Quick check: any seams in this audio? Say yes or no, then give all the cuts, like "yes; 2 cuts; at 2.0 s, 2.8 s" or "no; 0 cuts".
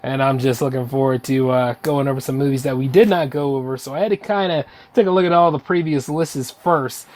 no; 0 cuts